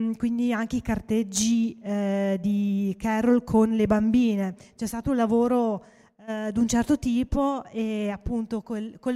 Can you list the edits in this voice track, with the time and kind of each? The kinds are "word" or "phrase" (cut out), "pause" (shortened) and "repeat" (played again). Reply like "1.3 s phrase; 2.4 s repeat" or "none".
none